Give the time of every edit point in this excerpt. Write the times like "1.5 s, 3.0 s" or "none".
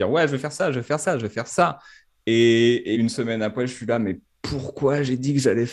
2.9 s